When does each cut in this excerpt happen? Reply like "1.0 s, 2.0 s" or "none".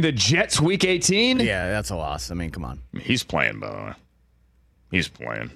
none